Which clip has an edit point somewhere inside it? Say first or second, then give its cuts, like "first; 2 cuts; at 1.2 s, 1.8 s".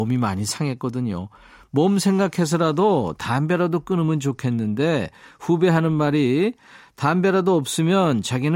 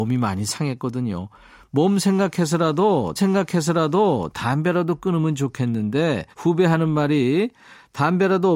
second; 2 cuts; at 3.2 s, 6.3 s